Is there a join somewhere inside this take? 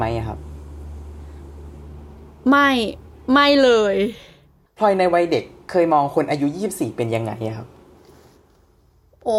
no; 0 cuts

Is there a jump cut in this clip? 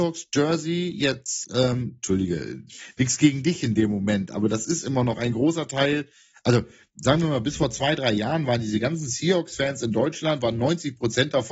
no; 0 cuts

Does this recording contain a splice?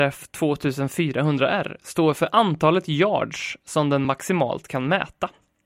no; 0 cuts

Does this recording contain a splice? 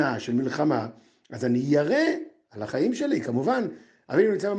no; 0 cuts

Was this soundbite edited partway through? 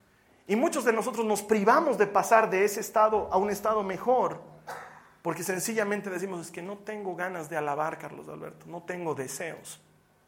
no; 0 cuts

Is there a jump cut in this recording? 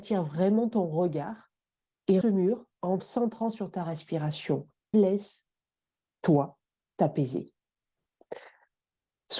yes; 3 cuts; at 2.2 s, 3.0 s, 4.9 s

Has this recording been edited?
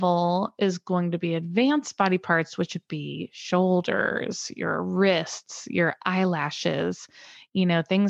no; 0 cuts

